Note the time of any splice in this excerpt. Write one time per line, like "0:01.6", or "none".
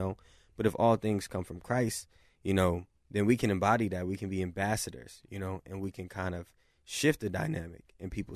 none